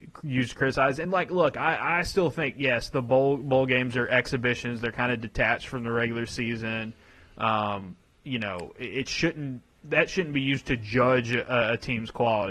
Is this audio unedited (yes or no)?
yes